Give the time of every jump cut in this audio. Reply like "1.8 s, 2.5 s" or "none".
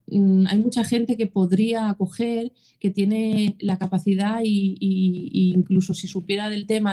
none